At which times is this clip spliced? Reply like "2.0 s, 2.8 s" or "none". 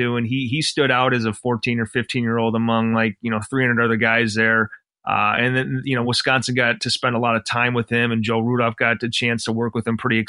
none